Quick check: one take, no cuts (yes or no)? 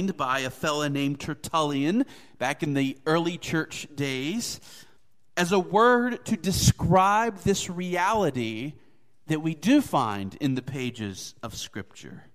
yes